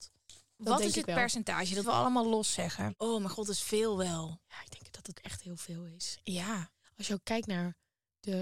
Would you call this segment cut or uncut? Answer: cut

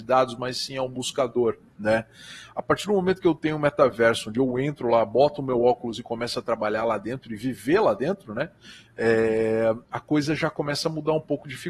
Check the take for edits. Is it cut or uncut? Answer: cut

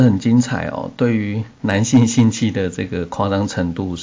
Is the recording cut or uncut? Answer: cut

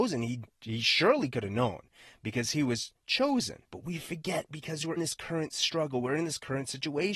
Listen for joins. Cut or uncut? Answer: cut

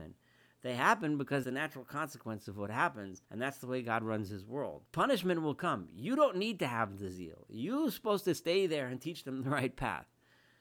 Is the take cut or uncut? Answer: cut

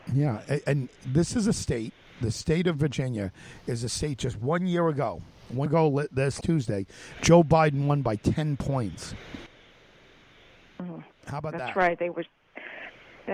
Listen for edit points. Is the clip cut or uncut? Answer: cut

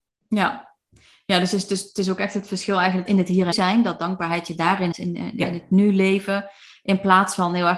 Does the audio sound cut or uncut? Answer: cut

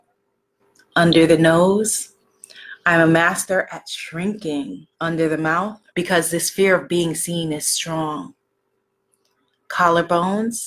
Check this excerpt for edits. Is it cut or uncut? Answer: cut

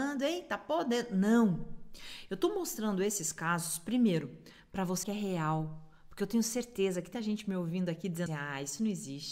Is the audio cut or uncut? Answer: cut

